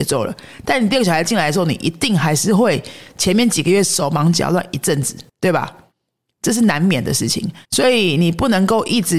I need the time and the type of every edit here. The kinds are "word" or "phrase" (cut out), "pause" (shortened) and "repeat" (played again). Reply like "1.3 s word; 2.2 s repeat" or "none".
5.3 s pause; 7.6 s pause